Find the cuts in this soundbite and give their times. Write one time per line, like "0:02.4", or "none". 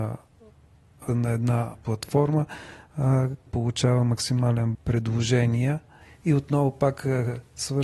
0:01.1
0:01.8
0:03.5
0:04.7